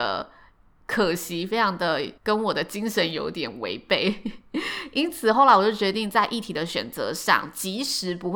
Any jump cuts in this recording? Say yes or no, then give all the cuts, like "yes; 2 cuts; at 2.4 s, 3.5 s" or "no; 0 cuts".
yes; 1 cut; at 2.2 s